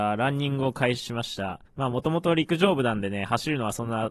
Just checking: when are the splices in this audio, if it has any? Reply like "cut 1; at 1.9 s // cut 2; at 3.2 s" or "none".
cut 1; at 1.7 s